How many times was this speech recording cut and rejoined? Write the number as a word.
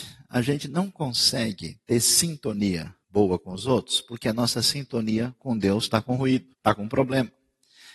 two